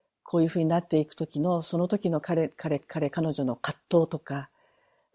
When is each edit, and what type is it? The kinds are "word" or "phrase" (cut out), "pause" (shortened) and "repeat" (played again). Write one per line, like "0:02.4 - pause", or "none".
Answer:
0:02.8 - repeat